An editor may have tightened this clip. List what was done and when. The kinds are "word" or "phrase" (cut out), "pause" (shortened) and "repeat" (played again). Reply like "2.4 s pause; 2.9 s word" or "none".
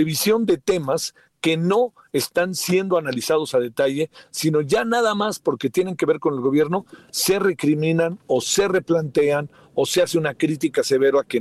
none